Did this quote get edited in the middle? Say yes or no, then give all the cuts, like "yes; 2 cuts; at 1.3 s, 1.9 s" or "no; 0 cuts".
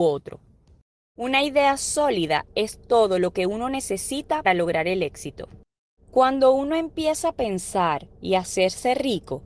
yes; 1 cut; at 4.4 s